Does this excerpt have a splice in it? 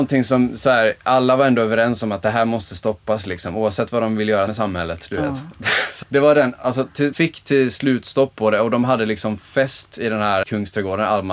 yes; 4 cuts; at 4.5 s, 6.0 s, 7.1 s, 10.4 s

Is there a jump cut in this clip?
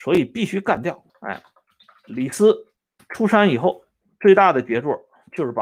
yes; 2 cuts; at 1.1 s, 3.0 s

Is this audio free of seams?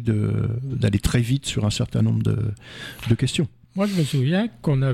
yes; 0 cuts

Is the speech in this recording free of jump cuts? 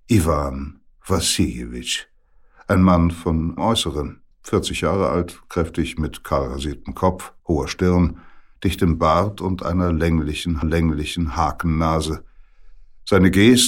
no; 5 cuts; at 3.6 s, 4.3 s, 5.4 s, 7.4 s, 10.6 s

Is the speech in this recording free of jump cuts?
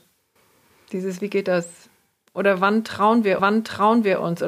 no; 1 cut; at 3.4 s

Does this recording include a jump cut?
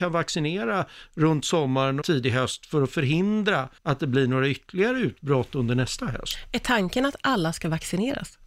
yes; 2 cuts; at 2.0 s, 3.8 s

